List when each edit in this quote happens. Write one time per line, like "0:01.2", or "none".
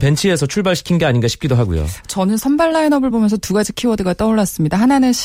none